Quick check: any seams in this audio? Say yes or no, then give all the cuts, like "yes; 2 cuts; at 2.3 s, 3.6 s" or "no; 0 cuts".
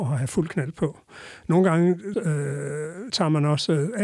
yes; 2 cuts; at 2.1 s, 3.1 s